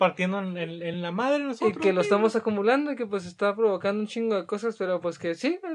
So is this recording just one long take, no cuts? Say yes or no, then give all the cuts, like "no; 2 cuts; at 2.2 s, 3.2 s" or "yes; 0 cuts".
yes; 0 cuts